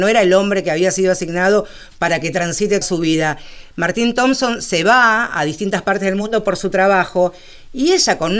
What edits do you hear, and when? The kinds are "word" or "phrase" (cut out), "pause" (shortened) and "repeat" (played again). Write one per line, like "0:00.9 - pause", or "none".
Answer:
0:02.8 - word